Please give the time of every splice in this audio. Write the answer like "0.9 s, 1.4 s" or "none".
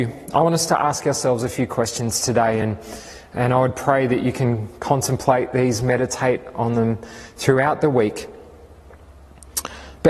none